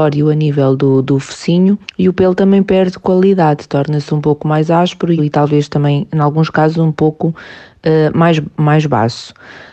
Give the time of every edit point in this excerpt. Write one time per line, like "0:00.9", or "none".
0:01.8
0:05.2

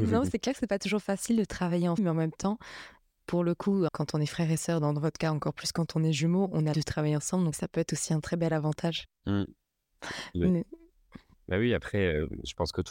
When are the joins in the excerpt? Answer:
0:02.0
0:03.9
0:06.7
0:07.5

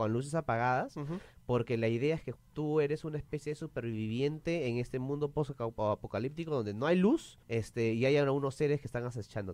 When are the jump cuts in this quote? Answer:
0:02.4
0:07.4

